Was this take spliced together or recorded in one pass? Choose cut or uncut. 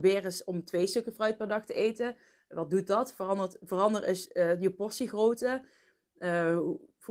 uncut